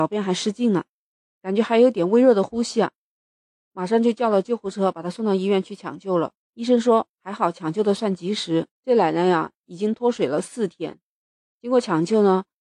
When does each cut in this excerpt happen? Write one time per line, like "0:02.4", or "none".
0:06.4
0:08.7